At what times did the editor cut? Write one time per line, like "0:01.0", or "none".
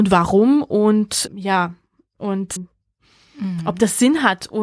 0:01.3
0:02.6